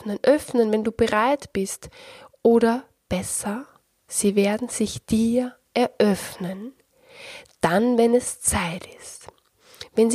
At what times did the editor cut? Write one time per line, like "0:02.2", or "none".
none